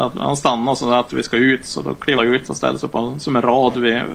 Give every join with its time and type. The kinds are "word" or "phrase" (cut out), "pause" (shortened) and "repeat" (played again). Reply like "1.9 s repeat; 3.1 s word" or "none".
2.2 s word